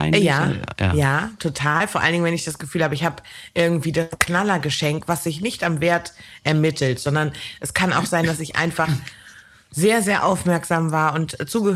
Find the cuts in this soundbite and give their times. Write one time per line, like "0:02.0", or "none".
none